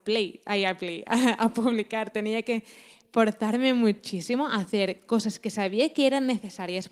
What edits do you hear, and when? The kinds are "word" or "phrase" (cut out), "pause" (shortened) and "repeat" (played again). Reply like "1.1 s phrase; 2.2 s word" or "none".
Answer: none